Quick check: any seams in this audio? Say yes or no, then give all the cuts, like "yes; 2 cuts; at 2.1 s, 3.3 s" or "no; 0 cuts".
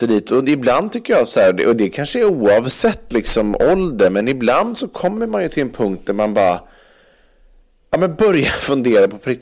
no; 0 cuts